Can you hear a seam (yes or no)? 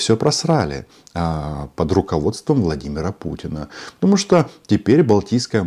no